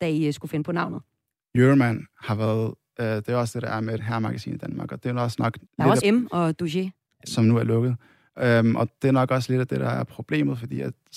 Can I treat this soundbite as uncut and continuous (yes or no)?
no